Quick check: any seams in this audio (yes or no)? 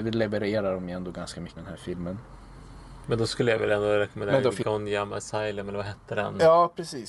yes